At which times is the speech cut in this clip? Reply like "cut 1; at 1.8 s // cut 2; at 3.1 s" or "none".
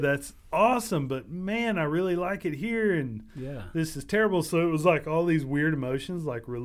none